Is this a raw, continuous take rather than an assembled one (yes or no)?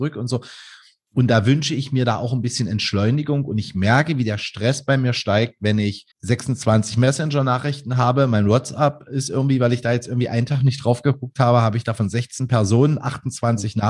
no